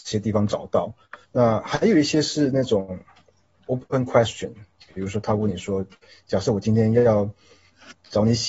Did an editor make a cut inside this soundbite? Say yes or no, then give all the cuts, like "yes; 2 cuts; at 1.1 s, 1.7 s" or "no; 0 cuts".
yes; 1 cut; at 1.2 s